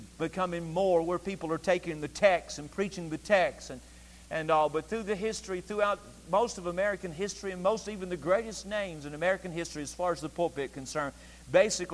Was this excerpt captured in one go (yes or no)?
yes